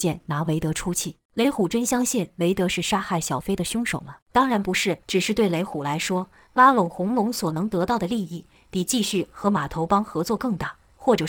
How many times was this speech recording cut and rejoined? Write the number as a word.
three